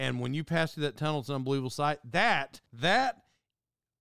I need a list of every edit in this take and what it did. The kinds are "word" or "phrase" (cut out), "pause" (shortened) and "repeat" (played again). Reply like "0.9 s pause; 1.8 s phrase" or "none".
2.7 s pause